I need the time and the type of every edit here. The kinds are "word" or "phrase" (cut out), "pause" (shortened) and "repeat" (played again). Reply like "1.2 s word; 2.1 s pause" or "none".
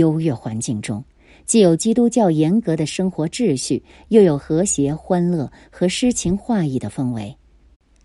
none